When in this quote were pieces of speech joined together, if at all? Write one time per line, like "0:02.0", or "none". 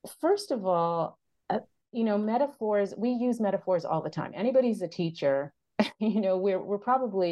none